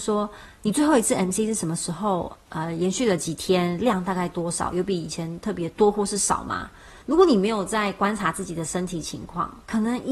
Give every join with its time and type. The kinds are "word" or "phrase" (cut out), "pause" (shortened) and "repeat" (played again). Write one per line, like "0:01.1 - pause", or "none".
0:07.0 - pause